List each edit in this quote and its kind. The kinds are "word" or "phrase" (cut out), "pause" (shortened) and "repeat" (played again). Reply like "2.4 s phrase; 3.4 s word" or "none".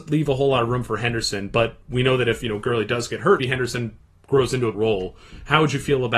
3.4 s word; 4.7 s word